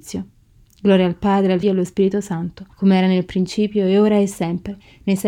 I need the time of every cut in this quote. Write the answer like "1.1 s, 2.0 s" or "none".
1.6 s, 2.7 s

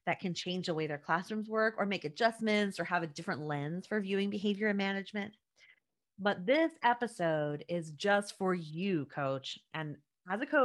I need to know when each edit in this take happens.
none

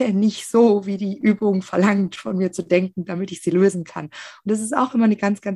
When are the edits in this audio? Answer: none

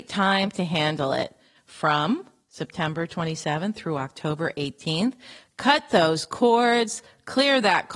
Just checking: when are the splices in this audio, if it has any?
none

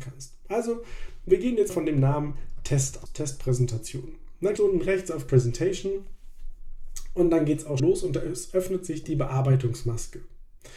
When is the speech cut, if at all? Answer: 1.7 s, 3.1 s, 4.6 s, 5.3 s, 7.8 s

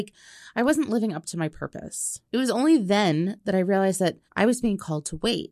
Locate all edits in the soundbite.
2.3 s, 4.3 s

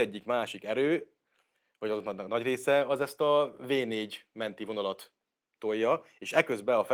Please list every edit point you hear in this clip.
none

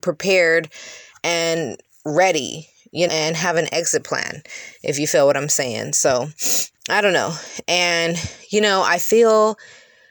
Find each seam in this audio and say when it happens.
3.1 s, 6.8 s

